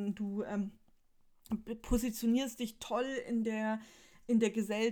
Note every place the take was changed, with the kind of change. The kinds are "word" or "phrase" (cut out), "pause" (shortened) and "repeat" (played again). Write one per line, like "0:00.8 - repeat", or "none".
none